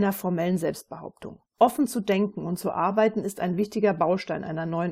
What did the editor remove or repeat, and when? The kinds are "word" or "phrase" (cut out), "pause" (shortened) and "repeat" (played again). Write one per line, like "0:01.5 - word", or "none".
0:01.5 - pause